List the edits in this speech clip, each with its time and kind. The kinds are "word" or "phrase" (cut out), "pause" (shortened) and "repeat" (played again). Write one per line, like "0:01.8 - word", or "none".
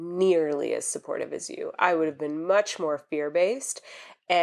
none

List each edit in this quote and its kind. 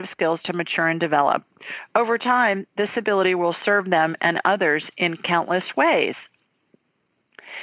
none

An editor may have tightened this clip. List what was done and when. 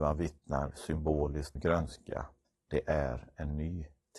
0:01.6 - word
0:02.4 - pause

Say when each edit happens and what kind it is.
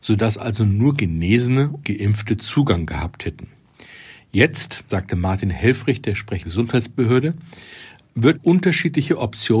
0:01.8 - word
0:04.9 - word
0:06.4 - word
0:08.4 - word

